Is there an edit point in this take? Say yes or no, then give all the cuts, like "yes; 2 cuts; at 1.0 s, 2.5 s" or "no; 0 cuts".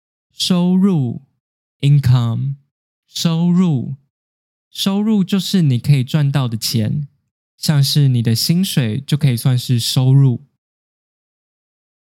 no; 0 cuts